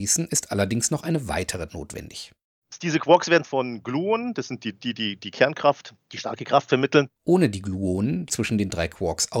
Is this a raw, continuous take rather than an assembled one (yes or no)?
no